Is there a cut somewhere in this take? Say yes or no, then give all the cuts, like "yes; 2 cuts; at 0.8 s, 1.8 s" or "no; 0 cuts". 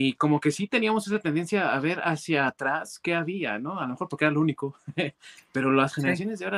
no; 0 cuts